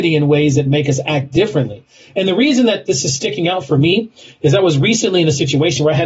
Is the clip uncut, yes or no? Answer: yes